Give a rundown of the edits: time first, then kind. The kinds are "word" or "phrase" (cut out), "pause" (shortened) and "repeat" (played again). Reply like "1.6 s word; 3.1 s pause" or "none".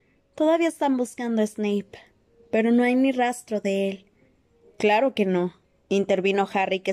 none